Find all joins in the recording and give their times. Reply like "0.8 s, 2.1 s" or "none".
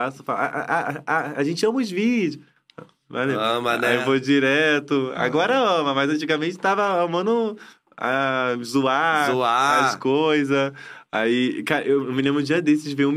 none